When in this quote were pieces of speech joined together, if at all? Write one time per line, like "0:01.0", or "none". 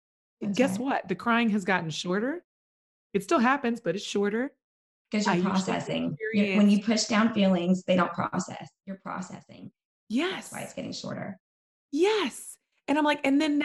none